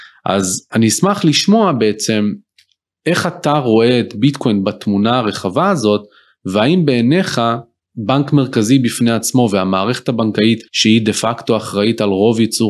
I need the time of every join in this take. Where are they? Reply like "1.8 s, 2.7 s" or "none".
10.7 s